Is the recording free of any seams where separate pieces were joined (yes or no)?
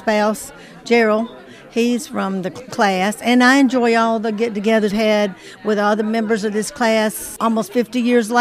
no